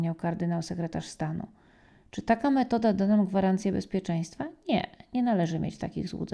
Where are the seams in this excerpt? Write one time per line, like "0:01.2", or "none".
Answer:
none